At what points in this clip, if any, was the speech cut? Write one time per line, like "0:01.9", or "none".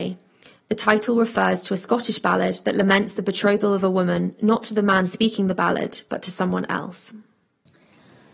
none